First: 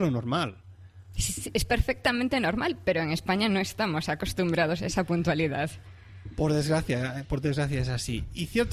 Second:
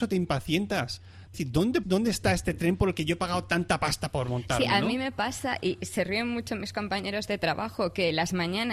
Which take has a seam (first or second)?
second